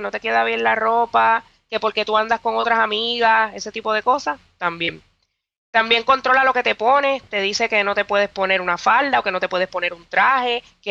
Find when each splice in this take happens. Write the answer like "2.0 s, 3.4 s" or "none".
none

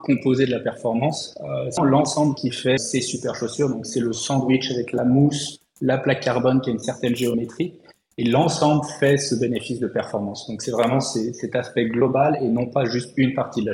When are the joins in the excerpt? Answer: 1.8 s, 2.8 s

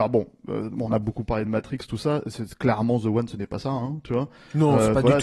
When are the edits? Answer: none

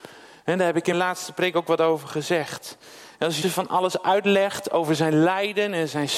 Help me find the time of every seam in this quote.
0.9 s, 3.4 s

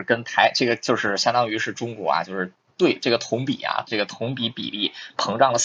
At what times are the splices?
none

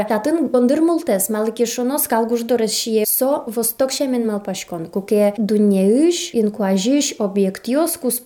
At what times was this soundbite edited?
none

